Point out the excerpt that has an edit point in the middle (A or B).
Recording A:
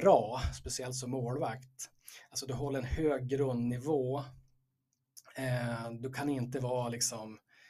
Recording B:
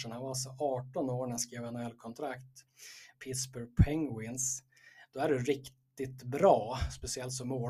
B